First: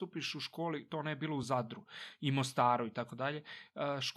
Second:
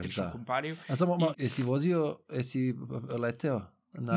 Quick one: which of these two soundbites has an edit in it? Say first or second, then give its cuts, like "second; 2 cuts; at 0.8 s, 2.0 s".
second; 1 cut; at 1.3 s